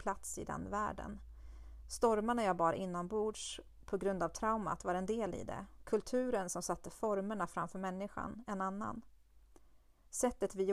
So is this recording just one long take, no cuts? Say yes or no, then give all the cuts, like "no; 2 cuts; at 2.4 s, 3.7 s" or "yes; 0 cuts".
yes; 0 cuts